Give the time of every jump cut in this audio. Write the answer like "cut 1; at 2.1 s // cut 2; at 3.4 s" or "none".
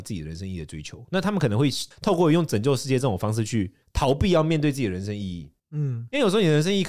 cut 1; at 1.9 s // cut 2; at 3.8 s // cut 3; at 5.6 s